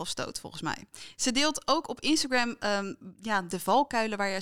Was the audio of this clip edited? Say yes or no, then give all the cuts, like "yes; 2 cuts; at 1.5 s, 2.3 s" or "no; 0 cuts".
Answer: no; 0 cuts